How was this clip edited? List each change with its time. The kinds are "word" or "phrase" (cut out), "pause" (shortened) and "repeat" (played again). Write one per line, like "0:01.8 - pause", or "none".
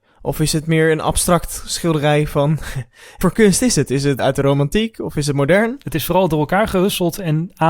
0:03.2 - word
0:04.2 - word